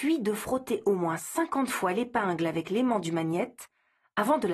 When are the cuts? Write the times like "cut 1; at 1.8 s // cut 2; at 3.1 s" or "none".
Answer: none